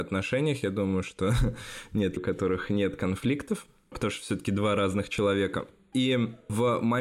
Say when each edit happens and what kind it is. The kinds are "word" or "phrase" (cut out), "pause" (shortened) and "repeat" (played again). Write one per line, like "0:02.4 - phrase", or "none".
0:02.2 - word

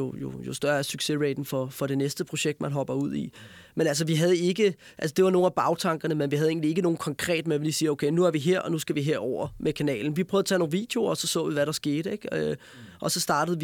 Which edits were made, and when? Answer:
none

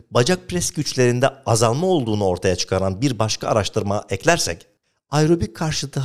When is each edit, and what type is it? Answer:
none

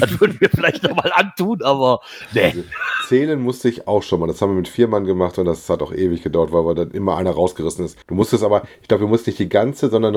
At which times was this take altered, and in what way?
0:08.0 - pause

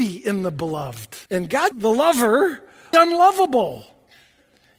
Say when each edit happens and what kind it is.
0:01.3 - pause
0:01.7 - word
0:02.9 - phrase

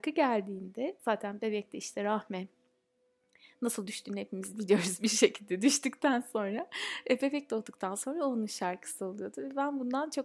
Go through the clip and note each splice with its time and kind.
none

